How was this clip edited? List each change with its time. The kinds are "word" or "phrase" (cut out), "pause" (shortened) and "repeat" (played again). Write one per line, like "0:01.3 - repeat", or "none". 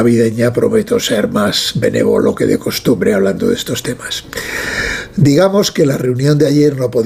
none